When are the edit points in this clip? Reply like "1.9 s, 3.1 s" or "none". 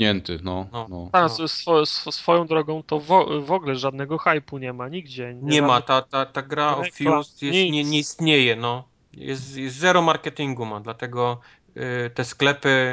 none